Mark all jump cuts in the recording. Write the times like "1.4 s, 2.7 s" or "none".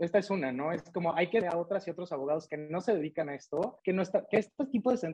1.4 s, 3.8 s